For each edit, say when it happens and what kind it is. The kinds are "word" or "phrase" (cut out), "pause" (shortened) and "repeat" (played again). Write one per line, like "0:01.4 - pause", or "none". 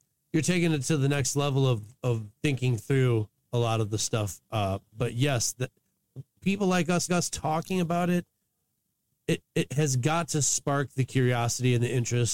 0:02.4 - pause
0:07.1 - repeat
0:09.4 - repeat